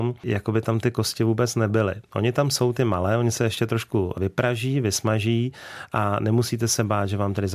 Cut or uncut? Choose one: uncut